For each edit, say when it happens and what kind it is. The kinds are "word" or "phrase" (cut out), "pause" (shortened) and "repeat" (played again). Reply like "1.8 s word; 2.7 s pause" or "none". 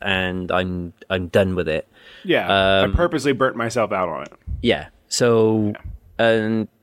none